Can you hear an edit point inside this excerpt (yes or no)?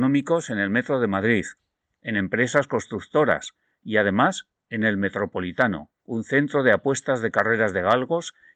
yes